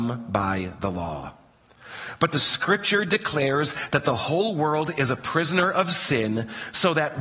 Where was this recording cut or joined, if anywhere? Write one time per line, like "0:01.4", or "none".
none